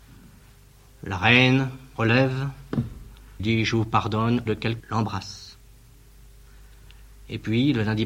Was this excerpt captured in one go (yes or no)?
no